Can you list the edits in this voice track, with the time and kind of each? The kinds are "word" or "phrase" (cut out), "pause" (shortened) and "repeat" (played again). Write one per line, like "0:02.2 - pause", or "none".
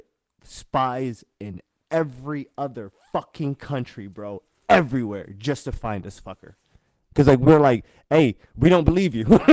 none